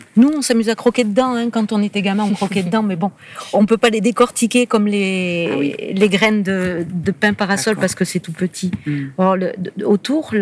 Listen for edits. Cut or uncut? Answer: uncut